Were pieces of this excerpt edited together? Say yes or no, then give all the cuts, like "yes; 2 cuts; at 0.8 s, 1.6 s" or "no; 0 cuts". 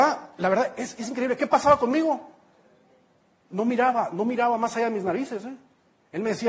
no; 0 cuts